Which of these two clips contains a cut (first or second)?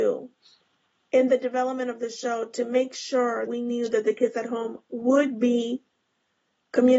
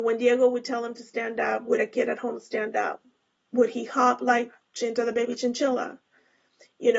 first